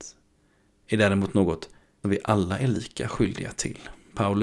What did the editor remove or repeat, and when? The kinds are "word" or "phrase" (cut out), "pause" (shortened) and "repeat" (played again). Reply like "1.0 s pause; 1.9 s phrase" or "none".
2.0 s word